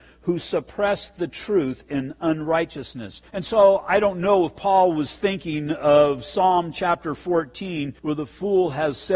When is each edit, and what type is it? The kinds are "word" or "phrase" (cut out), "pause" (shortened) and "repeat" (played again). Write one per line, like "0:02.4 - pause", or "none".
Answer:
0:03.3 - pause
0:08.0 - pause